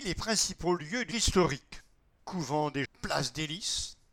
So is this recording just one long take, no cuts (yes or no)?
no